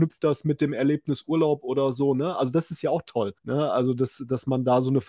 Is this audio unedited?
no; 1 cut; at 3.4 s

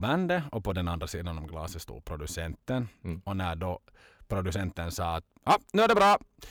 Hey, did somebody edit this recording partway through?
no; 0 cuts

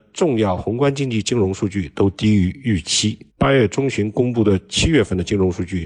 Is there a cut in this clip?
yes; 1 cut; at 3.3 s

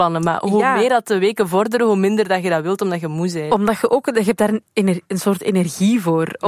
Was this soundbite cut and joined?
no; 0 cuts

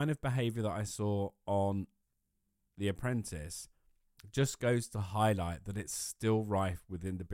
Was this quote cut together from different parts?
no; 0 cuts

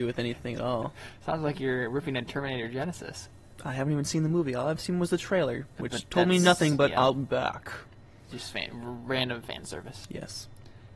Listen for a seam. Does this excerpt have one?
no; 0 cuts

